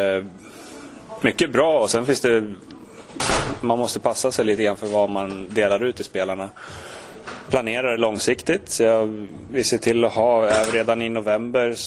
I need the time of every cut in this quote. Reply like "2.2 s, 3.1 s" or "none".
none